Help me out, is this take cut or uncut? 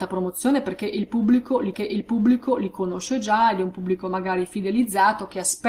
cut